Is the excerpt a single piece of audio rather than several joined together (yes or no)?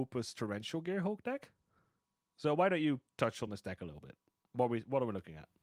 yes